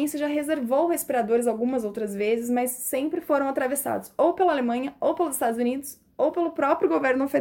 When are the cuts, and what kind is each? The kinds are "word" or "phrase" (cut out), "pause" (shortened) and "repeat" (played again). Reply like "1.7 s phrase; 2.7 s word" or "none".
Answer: none